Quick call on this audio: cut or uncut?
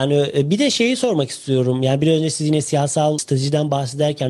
uncut